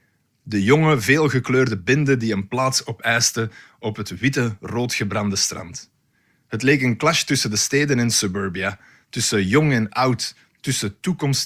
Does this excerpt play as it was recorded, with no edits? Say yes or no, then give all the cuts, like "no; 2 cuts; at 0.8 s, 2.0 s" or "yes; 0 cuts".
yes; 0 cuts